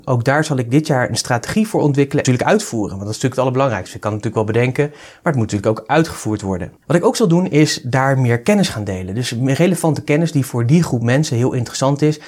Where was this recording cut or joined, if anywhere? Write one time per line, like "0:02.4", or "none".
0:06.8